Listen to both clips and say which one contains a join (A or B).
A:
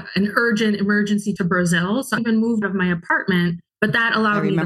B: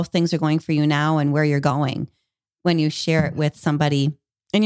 A